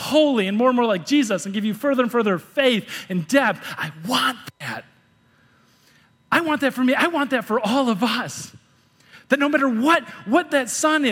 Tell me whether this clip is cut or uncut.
uncut